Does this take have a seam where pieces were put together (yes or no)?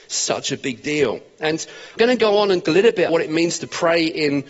yes